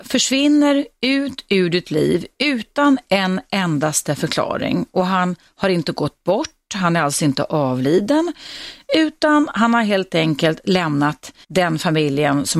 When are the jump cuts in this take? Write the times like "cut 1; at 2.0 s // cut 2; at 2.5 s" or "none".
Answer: cut 1; at 11.4 s